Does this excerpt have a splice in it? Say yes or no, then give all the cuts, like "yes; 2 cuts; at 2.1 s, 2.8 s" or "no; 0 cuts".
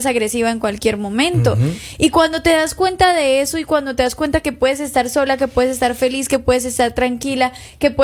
no; 0 cuts